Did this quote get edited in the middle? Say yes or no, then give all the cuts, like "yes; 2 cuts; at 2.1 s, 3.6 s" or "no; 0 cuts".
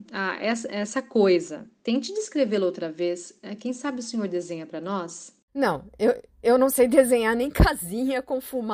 yes; 2 cuts; at 1.7 s, 5.4 s